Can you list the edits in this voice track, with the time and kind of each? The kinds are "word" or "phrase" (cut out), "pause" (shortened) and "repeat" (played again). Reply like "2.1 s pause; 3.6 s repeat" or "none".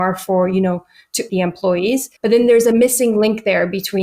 1.3 s word; 2.2 s pause